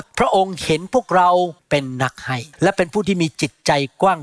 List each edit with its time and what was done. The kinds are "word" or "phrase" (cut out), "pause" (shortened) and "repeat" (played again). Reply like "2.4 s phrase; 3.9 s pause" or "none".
1.6 s pause; 2.5 s pause